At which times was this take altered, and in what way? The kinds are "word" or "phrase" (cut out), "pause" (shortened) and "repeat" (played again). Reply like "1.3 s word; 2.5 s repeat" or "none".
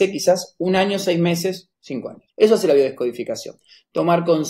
1.7 s pause; 2.3 s pause